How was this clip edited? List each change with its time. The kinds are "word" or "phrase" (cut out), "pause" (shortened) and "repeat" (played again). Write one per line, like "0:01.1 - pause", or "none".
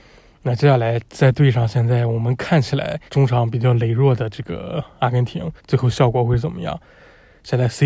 0:01.1 - pause
0:03.1 - pause
0:05.6 - pause

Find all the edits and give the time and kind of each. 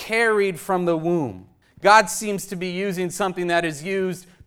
0:01.6 - pause

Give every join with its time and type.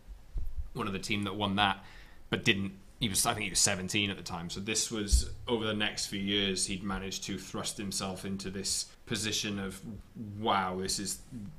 0:08.9 - pause

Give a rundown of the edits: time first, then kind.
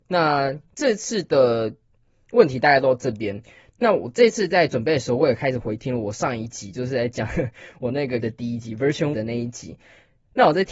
0:08.2 - word
0:09.1 - word

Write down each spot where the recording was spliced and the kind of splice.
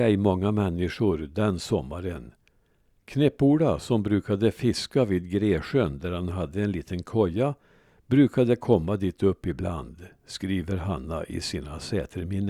none

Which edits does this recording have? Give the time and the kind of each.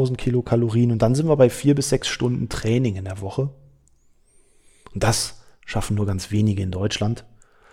none

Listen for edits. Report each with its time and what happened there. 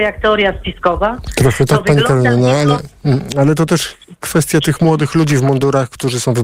none

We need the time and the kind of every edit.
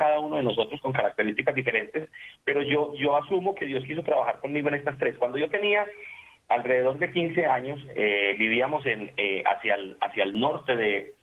none

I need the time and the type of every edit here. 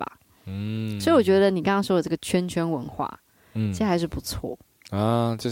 none

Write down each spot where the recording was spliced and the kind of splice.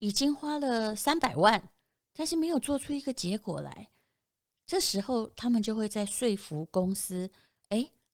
none

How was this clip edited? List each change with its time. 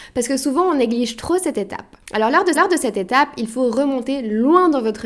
0:02.0 - pause
0:02.5 - repeat

